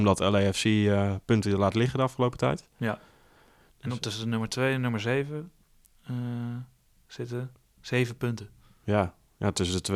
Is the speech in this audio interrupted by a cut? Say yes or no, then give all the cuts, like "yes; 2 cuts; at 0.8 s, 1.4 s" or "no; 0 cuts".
no; 0 cuts